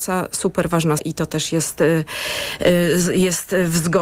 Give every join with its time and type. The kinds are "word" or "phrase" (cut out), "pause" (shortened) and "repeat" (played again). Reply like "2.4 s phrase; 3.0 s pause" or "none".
1.0 s word